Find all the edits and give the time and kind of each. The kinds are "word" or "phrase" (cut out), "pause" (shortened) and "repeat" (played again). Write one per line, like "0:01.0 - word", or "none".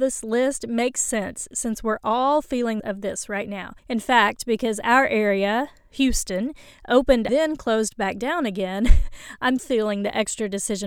0:02.8 - phrase
0:03.8 - pause
0:07.3 - phrase
0:09.6 - word